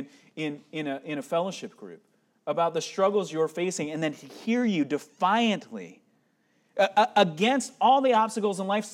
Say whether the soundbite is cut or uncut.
uncut